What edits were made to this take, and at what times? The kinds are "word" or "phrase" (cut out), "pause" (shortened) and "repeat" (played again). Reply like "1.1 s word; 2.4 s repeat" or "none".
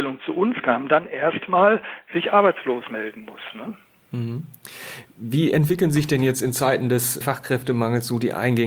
7.2 s word